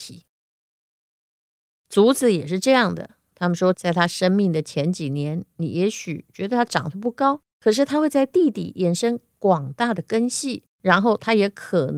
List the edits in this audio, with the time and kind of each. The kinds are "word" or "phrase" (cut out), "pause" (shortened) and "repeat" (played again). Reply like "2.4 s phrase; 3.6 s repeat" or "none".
3.7 s phrase; 7.5 s pause; 10.7 s pause